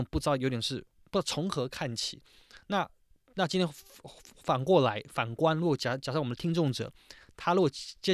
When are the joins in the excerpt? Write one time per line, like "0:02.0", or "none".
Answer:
none